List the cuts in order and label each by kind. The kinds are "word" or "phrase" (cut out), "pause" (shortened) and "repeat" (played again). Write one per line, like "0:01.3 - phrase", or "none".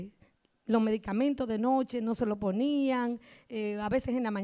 none